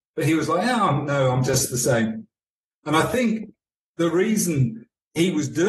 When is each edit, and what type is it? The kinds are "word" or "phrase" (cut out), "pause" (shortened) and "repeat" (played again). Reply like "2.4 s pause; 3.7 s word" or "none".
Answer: none